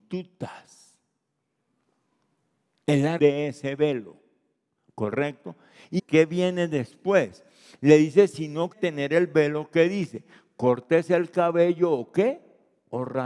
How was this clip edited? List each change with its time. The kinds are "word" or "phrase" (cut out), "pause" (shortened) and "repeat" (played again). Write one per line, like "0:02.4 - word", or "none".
0:03.2 - word
0:06.0 - word
0:08.7 - word